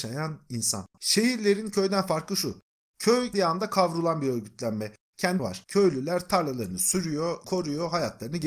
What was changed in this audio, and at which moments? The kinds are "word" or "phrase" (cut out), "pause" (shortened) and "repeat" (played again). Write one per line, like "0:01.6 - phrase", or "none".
0:00.9 - pause
0:03.3 - word
0:05.4 - word
0:07.4 - word